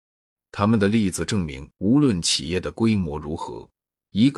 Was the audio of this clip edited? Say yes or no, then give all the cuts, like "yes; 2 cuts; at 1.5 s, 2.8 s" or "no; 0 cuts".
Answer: yes; 1 cut; at 1.7 s